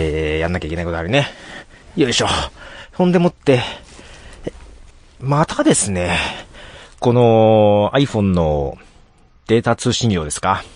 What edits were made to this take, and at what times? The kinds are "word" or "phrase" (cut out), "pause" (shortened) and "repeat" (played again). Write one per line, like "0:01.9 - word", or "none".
0:04.9 - pause